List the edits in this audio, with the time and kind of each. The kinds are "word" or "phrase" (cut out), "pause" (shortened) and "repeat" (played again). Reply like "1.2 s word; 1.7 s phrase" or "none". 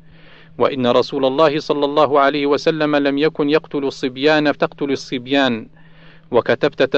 4.5 s word